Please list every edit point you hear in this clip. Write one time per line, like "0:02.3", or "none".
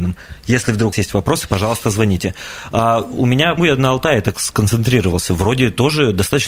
0:00.9
0:03.6